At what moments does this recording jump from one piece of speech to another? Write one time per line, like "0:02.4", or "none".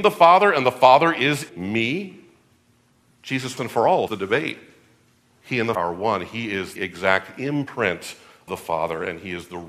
0:01.5
0:03.6
0:04.1
0:05.7
0:06.8
0:08.5